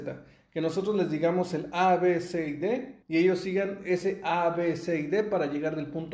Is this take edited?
yes; 1 cut; at 3.0 s

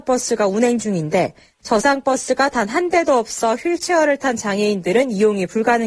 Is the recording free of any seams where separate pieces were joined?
yes; 0 cuts

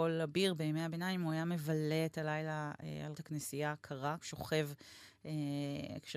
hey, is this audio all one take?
no; 2 cuts; at 3.1 s, 4.2 s

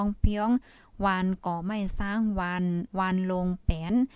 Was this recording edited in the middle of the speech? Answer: yes; 1 cut; at 2.9 s

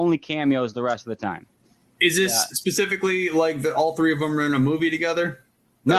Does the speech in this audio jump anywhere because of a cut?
no; 0 cuts

